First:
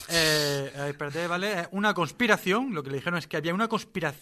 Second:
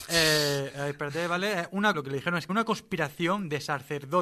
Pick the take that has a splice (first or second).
second